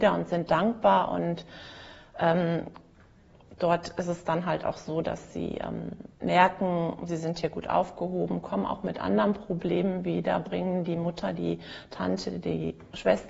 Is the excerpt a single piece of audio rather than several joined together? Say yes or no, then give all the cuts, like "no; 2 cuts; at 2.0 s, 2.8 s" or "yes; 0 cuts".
no; 1 cut; at 6.1 s